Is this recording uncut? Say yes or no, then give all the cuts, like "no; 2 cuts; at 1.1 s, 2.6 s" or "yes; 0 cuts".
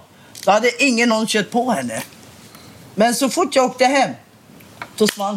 yes; 0 cuts